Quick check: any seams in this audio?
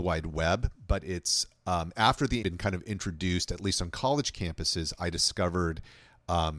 yes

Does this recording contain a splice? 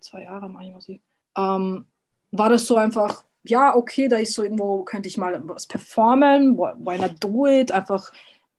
yes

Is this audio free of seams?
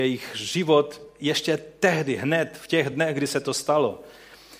yes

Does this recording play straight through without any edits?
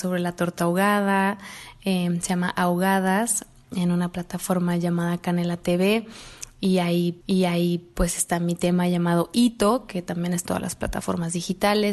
no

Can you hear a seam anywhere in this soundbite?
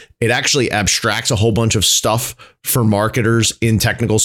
no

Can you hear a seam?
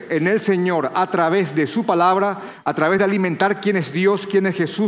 no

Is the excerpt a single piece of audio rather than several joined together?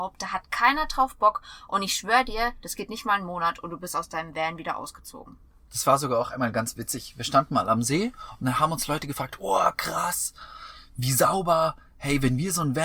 yes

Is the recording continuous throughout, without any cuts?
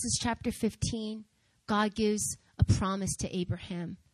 yes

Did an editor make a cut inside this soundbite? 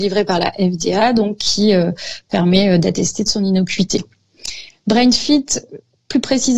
no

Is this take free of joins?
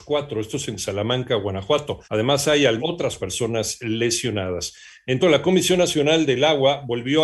no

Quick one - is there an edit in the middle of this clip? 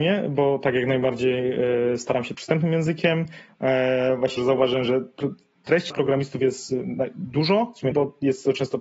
yes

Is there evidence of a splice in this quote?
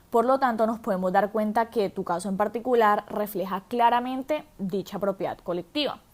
no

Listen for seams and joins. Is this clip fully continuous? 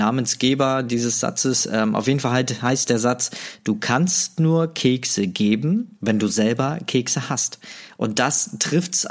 no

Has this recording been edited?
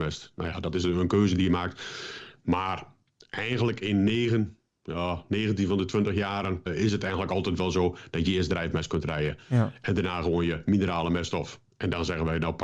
yes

